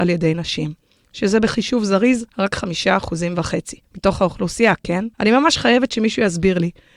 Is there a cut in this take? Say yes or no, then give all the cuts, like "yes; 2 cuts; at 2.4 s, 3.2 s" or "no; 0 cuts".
yes; 3 cuts; at 2.3 s, 3.8 s, 5.1 s